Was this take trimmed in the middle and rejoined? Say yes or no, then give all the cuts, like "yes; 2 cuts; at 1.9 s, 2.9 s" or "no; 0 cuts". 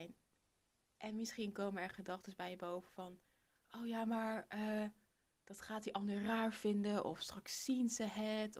no; 0 cuts